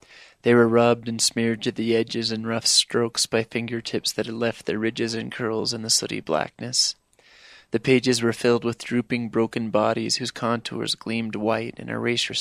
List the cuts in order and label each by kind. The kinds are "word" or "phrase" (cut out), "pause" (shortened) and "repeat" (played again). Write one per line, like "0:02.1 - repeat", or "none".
none